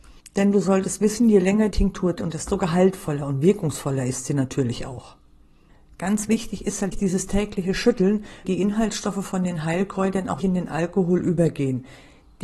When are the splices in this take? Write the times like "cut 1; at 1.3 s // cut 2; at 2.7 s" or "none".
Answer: cut 1; at 1.7 s // cut 2; at 2.2 s // cut 3; at 6.9 s // cut 4; at 8.4 s // cut 5; at 10.4 s